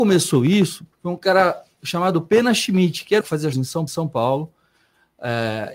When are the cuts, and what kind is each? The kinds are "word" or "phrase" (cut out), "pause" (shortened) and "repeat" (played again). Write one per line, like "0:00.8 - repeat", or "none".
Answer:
0:00.9 - pause
0:03.2 - phrase
0:03.5 - word
0:03.9 - repeat

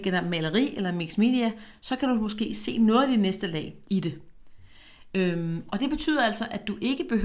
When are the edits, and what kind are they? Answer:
none

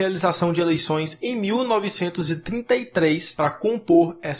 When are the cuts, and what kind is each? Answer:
none

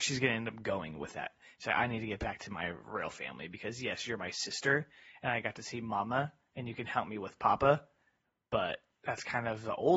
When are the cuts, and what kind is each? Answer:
0:08.9 - word

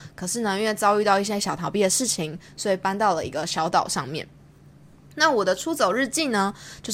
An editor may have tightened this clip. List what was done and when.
none

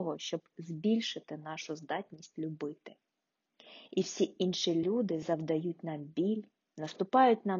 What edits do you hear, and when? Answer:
none

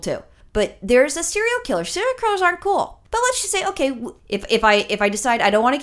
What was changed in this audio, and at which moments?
0:04.2 - pause

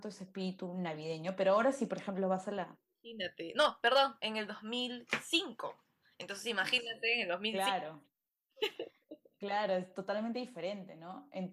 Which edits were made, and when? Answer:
none

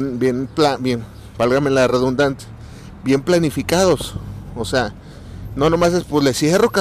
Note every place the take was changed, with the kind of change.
none

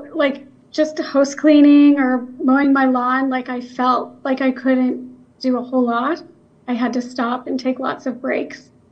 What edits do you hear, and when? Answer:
none

